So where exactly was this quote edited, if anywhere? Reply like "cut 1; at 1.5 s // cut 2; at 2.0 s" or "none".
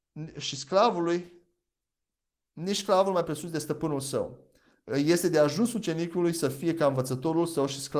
none